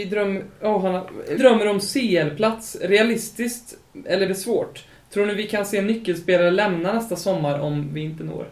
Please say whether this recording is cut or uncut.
cut